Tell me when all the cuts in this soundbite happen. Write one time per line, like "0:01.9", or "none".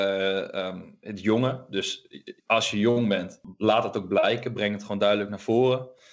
0:02.4